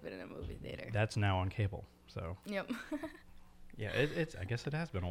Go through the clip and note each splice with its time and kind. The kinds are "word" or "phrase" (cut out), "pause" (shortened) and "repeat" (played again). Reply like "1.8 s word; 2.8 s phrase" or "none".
none

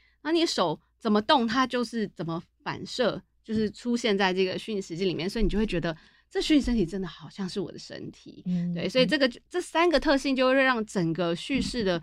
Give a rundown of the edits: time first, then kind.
none

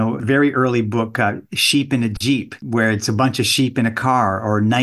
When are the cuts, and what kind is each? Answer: 2.6 s pause

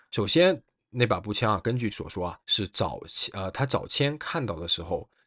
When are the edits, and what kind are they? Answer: 1.9 s word; 2.4 s pause

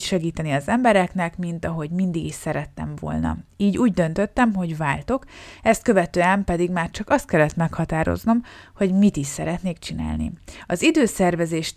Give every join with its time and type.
none

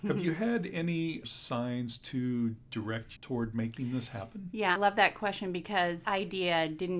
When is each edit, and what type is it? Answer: 1.2 s word; 3.2 s word; 4.8 s word; 6.0 s word

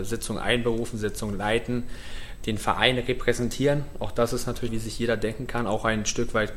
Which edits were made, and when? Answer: 4.7 s phrase

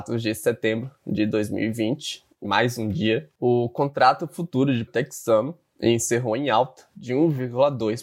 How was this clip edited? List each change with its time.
2.4 s phrase; 3.4 s pause; 4.9 s word

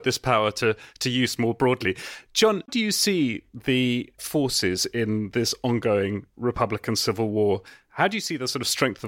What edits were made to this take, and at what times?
2.7 s word; 4.2 s word

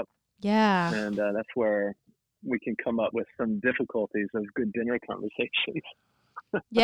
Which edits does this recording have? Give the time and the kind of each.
none

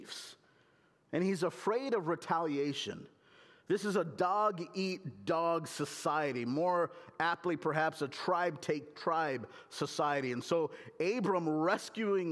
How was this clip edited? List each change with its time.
none

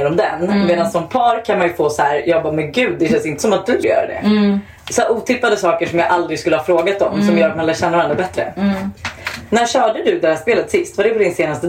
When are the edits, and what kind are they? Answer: 3.8 s word

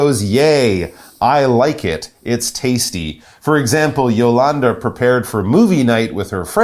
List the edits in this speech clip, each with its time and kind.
none

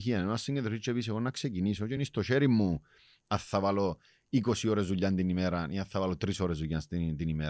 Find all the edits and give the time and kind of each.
none

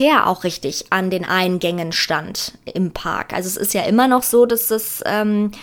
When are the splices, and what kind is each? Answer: none

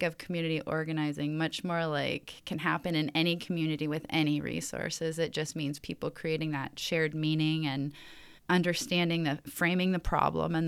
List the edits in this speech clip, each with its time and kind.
8.4 s pause

